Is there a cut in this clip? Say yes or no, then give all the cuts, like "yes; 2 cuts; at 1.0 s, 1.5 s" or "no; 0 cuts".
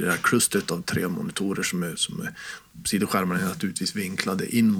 no; 0 cuts